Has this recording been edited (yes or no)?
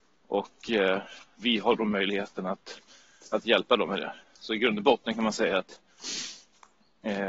yes